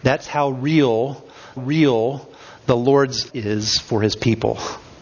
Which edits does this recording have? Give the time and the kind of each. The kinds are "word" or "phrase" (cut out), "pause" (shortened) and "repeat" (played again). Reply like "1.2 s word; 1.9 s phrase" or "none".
1.6 s repeat; 3.3 s word